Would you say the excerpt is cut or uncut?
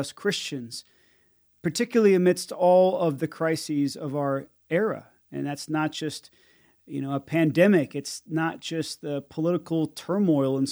uncut